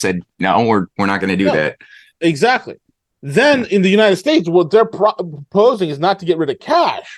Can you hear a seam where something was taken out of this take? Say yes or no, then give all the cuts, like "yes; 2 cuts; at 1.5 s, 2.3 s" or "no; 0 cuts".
no; 0 cuts